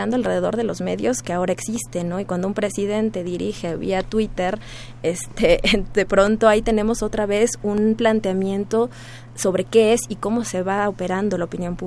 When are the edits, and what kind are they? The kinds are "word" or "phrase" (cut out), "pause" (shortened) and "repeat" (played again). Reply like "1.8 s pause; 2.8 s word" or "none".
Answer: none